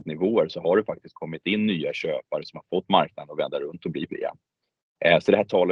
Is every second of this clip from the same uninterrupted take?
no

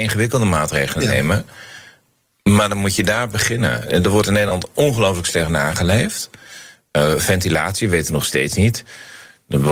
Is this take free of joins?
yes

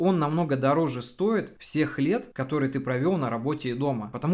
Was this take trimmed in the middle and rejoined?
no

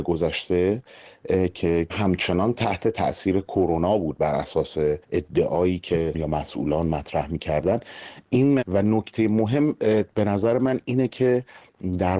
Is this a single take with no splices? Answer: no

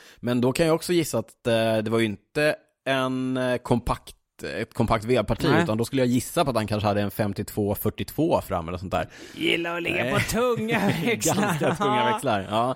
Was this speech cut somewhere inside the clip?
no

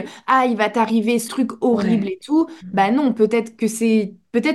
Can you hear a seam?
yes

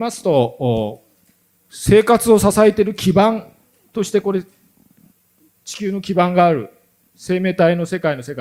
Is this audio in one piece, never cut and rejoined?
yes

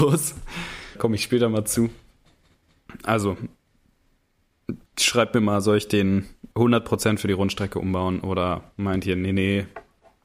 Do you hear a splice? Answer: yes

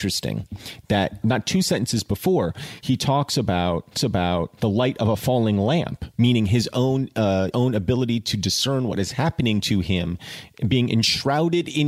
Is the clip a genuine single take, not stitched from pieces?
no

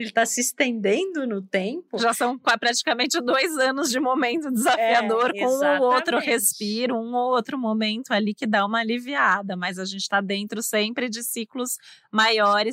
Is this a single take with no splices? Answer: yes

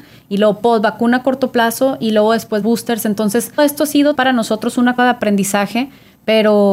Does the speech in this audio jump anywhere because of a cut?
yes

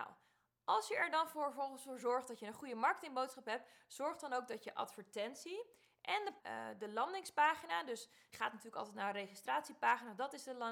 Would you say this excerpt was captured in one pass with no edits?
no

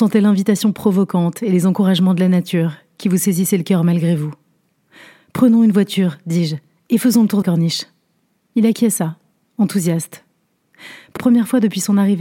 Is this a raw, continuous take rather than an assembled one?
no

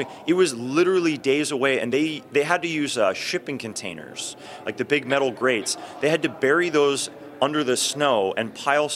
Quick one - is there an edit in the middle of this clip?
no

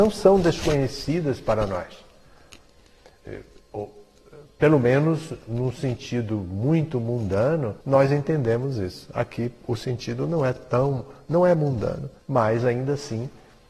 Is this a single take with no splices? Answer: no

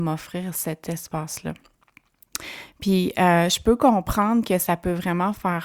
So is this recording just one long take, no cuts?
yes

